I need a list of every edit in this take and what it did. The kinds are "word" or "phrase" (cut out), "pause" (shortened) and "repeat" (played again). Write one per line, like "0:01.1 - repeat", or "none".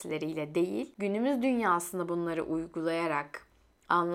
none